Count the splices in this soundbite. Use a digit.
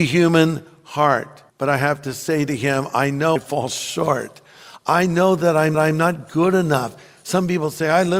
3